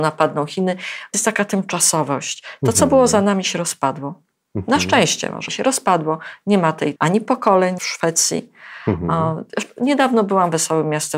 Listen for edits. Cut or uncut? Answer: cut